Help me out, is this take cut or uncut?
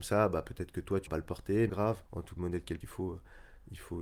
cut